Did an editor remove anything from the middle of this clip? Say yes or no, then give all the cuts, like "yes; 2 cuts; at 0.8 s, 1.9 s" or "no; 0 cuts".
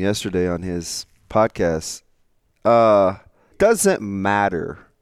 yes; 1 cut; at 3.5 s